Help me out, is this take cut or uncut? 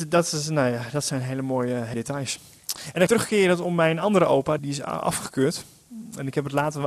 cut